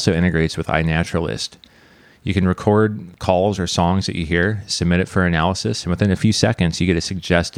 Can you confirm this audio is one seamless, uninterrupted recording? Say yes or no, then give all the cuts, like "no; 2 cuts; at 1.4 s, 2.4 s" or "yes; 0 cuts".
yes; 0 cuts